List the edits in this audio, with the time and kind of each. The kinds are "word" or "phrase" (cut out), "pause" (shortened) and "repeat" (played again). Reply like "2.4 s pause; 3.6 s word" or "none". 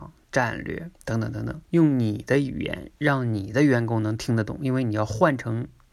0.9 s pause; 1.6 s pause